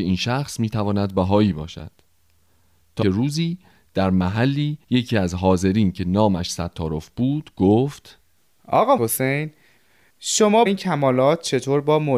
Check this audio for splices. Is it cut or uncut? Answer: cut